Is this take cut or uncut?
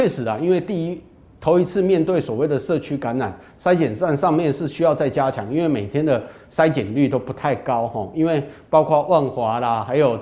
uncut